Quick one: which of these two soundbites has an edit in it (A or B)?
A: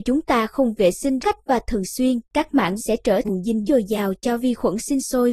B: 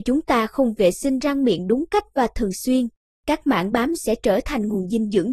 A